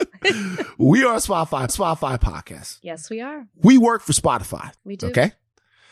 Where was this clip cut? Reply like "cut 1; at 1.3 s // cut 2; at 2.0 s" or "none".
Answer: cut 1; at 1.7 s // cut 2; at 3.5 s // cut 3; at 4.8 s